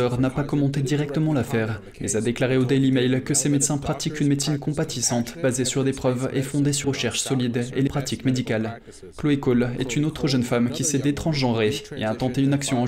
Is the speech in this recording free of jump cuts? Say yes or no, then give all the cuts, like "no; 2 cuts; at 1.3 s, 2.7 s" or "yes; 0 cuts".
no; 2 cuts; at 6.8 s, 7.9 s